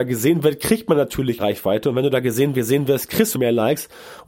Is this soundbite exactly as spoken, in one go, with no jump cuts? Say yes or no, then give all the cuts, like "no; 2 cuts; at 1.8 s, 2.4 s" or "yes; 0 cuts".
no; 3 cuts; at 1.4 s, 2.5 s, 3.3 s